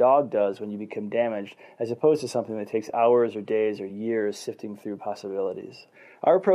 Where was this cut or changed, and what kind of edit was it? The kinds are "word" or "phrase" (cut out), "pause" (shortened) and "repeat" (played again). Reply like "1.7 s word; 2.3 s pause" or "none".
none